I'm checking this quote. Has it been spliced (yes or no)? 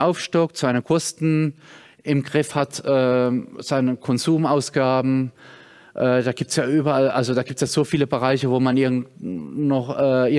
no